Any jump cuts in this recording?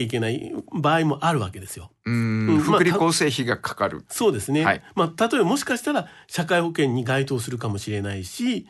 no; 0 cuts

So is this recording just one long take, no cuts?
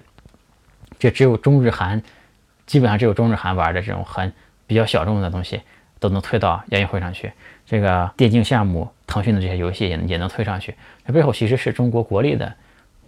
no; 1 cut; at 8.1 s

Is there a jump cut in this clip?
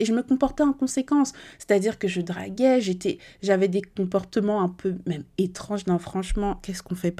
no; 0 cuts

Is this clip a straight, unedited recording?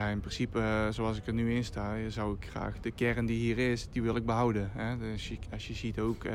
yes; 0 cuts

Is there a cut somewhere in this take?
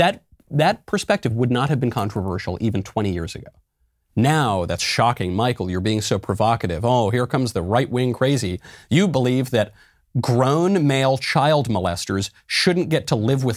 no; 0 cuts

